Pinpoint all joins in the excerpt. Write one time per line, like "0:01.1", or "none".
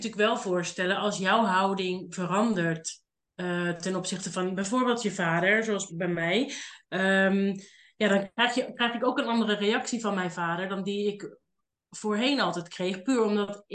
0:05.9